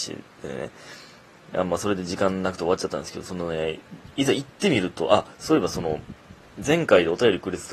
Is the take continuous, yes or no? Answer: yes